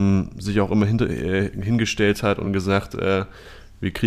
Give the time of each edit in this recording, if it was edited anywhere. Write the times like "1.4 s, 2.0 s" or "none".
none